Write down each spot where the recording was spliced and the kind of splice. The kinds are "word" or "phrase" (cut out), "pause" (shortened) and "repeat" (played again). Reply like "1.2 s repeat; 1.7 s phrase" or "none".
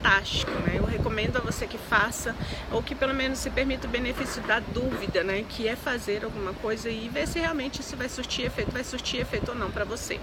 8.7 s repeat